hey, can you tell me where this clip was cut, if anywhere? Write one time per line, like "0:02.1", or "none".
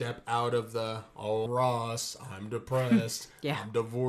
0:01.5